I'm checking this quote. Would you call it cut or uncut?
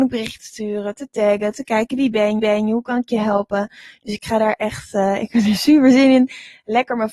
cut